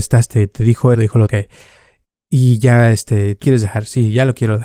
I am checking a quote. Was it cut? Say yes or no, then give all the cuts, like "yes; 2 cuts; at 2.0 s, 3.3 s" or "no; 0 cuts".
yes; 3 cuts; at 0.9 s, 1.3 s, 3.4 s